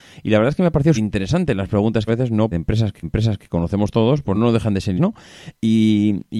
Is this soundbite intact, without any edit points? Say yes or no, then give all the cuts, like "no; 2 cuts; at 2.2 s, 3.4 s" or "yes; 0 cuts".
no; 6 cuts; at 0.9 s, 2.1 s, 2.5 s, 3.0 s, 4.3 s, 5.0 s